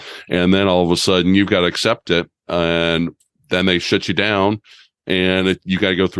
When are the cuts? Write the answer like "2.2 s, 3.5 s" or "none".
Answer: none